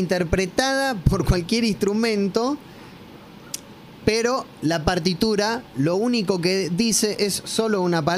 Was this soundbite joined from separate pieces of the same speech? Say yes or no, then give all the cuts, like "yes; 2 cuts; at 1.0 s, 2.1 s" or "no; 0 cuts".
no; 0 cuts